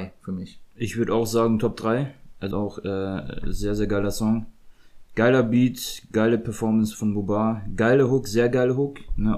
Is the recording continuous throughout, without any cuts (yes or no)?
no